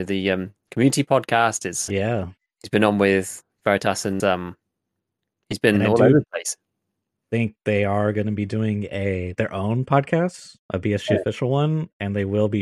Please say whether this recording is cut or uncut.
cut